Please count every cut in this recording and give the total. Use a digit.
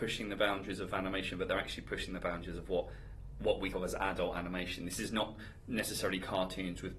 1